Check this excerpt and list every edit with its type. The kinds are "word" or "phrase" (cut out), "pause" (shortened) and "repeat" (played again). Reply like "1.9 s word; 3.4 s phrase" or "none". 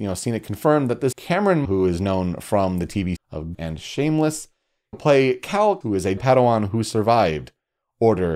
1.1 s word; 1.6 s word; 3.2 s word; 3.5 s word; 4.9 s word; 5.8 s word; 6.2 s word